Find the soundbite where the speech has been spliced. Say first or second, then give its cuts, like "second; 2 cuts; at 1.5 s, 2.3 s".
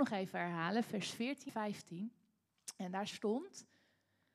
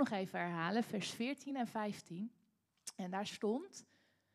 first; 1 cut; at 1.5 s